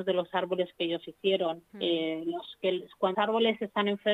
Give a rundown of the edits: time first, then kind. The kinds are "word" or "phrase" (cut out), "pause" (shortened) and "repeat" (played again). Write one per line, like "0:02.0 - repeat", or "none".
0:01.7 - pause
0:03.1 - word